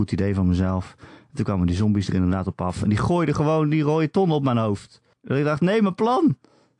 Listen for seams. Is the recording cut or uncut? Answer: cut